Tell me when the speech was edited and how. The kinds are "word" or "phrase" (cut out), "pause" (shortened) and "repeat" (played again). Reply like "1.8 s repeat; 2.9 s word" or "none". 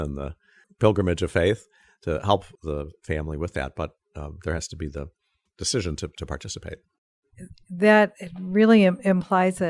none

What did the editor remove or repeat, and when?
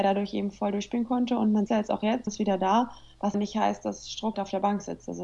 1.7 s word; 2.3 s word; 3.3 s word; 4.3 s word

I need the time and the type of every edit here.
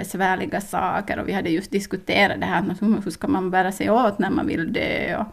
none

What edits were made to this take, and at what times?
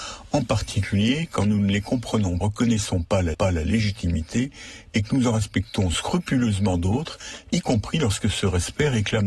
2.4 s phrase; 3.3 s repeat

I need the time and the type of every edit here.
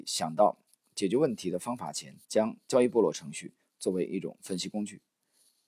2.2 s pause

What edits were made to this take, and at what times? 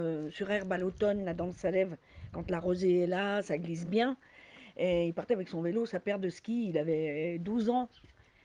none

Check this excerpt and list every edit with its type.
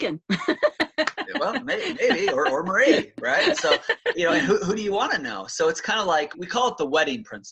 6.3 s word

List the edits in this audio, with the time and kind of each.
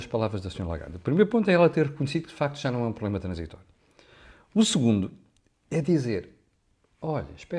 none

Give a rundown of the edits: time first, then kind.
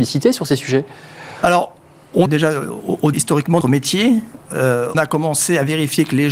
2.3 s word; 3.1 s word; 3.6 s word; 4.9 s word

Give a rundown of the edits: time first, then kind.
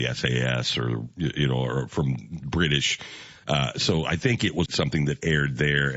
4.7 s word

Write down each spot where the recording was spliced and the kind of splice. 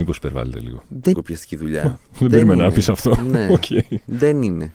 1.1 s phrase; 2.1 s pause

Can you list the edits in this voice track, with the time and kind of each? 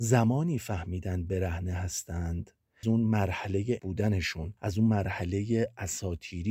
2.8 s phrase; 3.8 s phrase; 4.6 s pause

